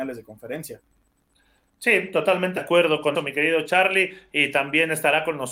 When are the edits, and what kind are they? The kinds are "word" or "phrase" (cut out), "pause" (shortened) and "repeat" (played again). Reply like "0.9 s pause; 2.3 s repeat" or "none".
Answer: 2.6 s word; 3.1 s word